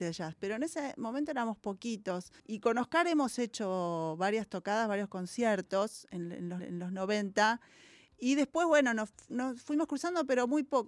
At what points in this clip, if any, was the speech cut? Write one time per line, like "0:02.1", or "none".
0:02.4
0:06.6